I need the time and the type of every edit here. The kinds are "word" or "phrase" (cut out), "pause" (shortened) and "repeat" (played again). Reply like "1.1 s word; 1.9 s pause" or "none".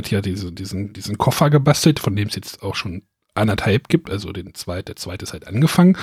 3.2 s pause